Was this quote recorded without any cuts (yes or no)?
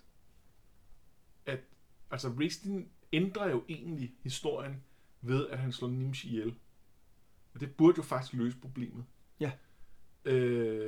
yes